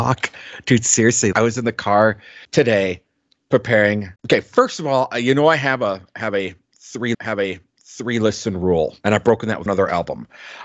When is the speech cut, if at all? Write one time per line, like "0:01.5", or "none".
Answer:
0:01.3
0:02.4
0:04.2
0:07.1
0:09.0
0:09.7